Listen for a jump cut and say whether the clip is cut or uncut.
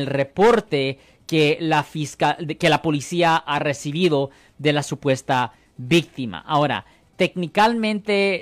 uncut